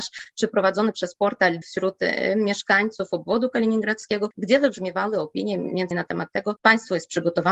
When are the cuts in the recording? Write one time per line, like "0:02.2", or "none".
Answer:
0:01.6
0:05.9
0:06.6